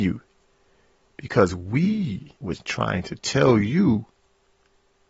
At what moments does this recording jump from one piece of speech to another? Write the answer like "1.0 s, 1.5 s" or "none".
2.3 s